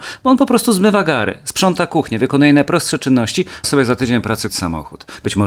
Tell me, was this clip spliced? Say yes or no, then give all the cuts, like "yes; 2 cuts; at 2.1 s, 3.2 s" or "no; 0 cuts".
yes; 2 cuts; at 3.6 s, 4.5 s